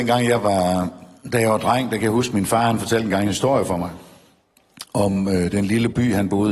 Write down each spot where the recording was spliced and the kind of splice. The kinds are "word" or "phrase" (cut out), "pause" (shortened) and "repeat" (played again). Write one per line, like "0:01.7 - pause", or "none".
none

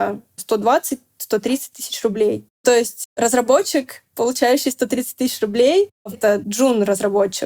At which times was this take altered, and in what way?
0:06.1 - word

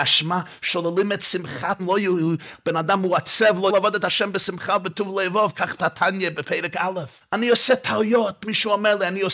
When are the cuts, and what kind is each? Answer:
0:01.8 - word
0:03.7 - word
0:05.8 - word
0:07.2 - pause

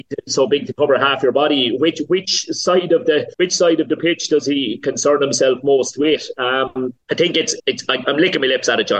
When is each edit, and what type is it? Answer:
0:03.3 - pause
0:07.0 - pause
0:07.6 - word

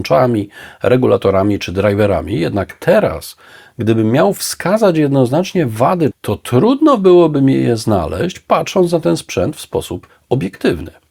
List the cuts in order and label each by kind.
0:06.1 - phrase

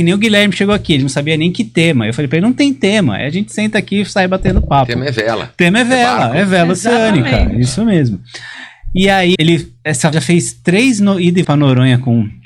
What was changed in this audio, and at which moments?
0:09.4 - word
0:10.1 - word
0:11.4 - word

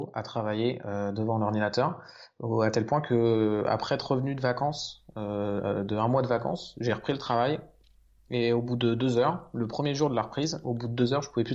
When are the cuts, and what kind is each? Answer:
none

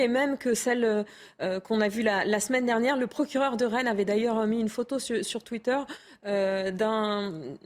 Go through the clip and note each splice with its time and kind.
none

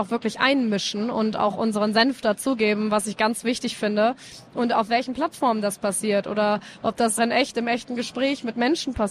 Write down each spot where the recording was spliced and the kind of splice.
0:07.2 - word

